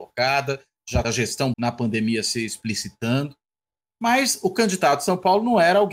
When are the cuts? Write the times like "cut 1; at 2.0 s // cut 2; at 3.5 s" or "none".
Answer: cut 1; at 1.0 s // cut 2; at 1.5 s